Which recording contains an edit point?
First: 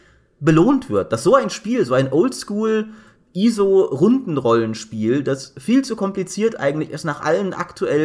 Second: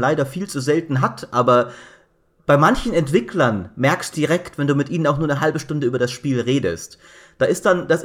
second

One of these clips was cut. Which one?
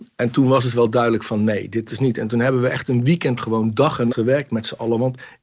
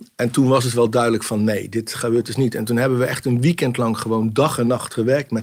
first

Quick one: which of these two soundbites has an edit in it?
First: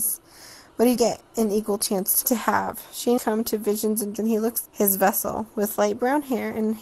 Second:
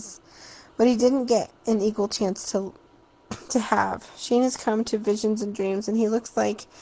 first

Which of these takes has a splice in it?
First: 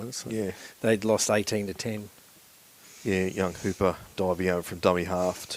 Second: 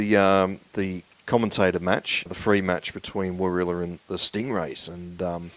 second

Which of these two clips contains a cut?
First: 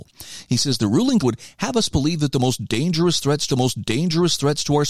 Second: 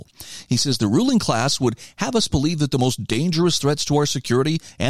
first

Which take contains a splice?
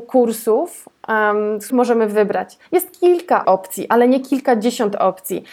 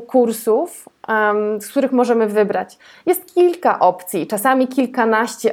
first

